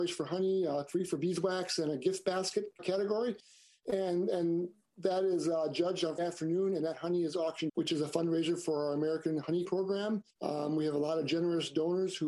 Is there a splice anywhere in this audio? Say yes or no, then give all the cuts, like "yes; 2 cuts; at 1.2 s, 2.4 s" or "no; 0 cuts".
yes; 5 cuts; at 2.8 s, 6.2 s, 7.7 s, 9.6 s, 10.3 s